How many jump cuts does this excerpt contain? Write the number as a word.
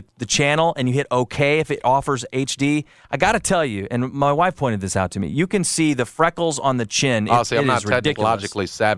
zero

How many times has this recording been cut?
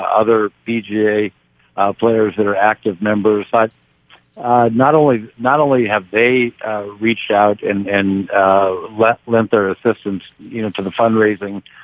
two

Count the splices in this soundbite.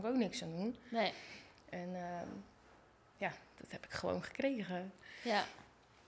zero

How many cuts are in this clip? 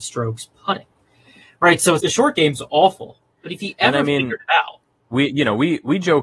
one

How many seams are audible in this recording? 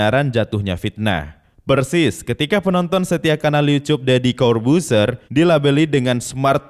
one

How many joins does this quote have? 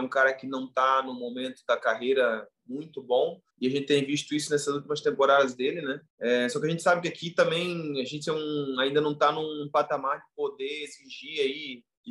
two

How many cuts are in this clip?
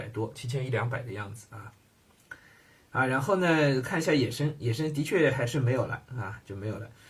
zero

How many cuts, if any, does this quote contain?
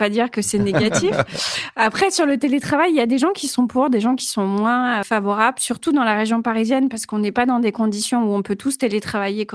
one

